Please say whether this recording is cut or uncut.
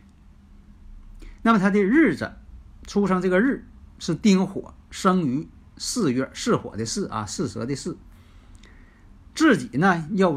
uncut